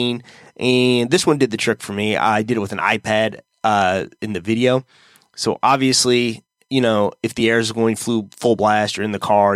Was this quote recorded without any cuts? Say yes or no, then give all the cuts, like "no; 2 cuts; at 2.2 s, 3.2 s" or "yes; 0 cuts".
yes; 0 cuts